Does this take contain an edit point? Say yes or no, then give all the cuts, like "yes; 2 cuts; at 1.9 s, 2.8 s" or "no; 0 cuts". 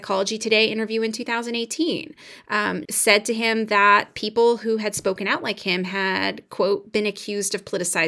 yes; 1 cut; at 2.8 s